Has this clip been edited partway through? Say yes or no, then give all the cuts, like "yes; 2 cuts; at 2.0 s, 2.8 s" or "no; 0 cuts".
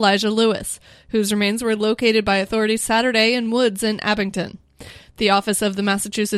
no; 0 cuts